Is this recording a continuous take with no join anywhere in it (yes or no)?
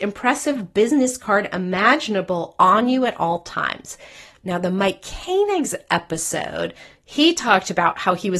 yes